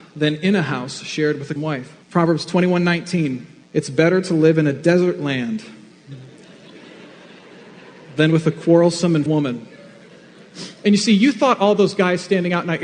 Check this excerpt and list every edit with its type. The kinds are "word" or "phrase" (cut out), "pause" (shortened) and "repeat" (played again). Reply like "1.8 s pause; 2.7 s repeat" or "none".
1.6 s word; 2.0 s pause; 3.6 s pause; 9.3 s word

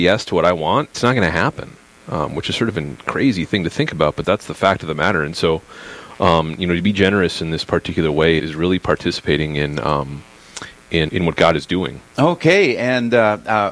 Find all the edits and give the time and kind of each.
0.9 s word; 4.2 s word; 8.4 s word; 11.1 s word

